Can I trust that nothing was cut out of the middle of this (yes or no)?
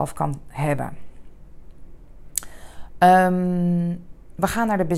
yes